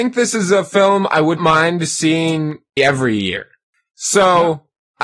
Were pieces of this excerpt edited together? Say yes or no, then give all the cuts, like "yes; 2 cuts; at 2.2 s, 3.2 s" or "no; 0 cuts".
yes; 2 cuts; at 1.4 s, 2.8 s